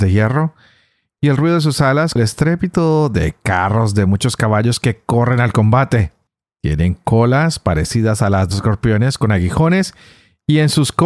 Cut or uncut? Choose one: cut